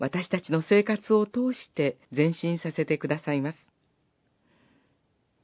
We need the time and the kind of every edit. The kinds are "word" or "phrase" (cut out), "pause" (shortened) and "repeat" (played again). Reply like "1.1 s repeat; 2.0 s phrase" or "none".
2.0 s pause